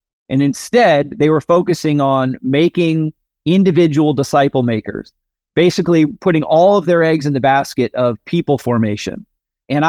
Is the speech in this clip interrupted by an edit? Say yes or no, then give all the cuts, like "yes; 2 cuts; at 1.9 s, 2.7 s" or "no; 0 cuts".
no; 0 cuts